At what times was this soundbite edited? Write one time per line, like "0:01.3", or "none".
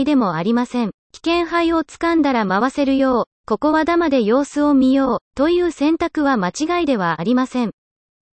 0:01.0
0:05.2